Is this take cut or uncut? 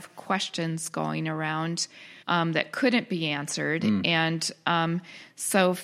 cut